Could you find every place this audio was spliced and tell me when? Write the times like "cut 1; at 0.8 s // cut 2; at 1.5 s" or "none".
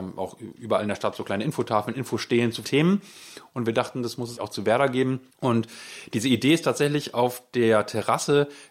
cut 1; at 2.6 s // cut 2; at 4.4 s // cut 3; at 5.3 s